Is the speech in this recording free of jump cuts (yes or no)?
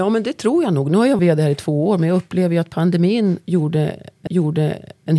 no